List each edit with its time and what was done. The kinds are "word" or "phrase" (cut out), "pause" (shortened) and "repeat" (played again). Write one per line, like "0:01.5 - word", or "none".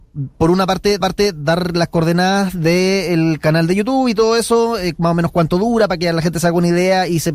0:01.0 - repeat

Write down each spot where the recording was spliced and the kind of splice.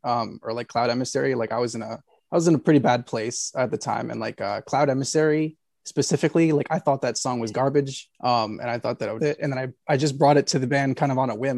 0:02.2 - pause
0:08.1 - pause
0:09.2 - phrase

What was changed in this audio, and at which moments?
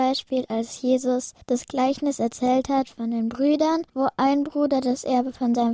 0:01.4 - pause
0:03.9 - pause

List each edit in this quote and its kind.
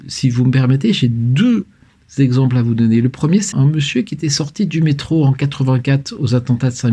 0:03.5 - word

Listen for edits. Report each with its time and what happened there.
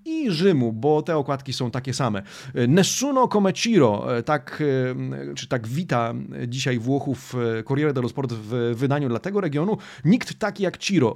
0:05.3 - word

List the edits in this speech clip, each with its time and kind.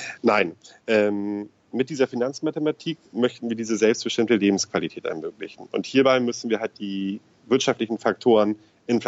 none

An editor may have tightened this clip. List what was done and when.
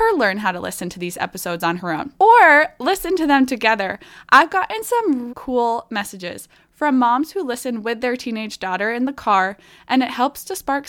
0:02.2 - pause
0:05.3 - word

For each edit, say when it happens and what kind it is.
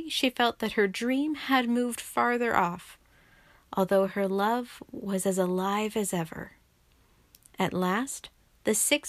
none

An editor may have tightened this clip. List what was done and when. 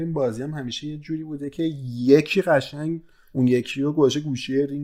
none

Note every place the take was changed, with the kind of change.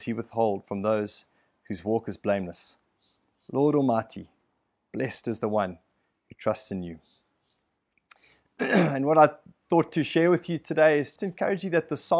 0:11.2 - word

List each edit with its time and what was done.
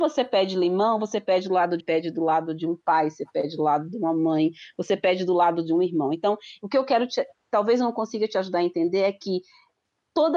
0:01.8 - phrase

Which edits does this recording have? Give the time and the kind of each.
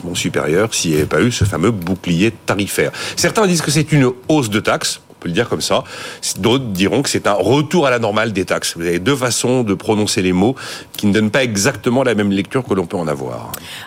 none

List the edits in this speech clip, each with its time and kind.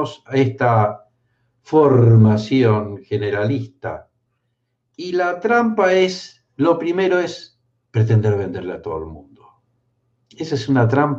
none

